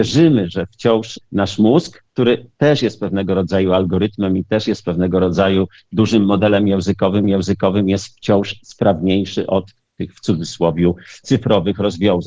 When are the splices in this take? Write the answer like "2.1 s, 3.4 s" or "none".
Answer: 7.2 s